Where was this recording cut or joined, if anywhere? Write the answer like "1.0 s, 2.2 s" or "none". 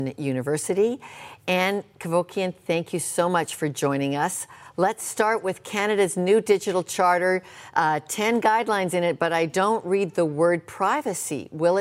none